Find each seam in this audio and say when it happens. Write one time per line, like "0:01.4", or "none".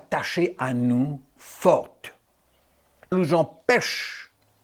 0:01.4
0:03.1